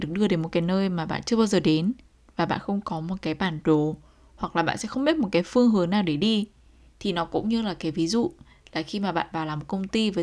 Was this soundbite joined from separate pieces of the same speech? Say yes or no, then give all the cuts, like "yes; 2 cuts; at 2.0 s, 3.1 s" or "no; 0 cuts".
no; 0 cuts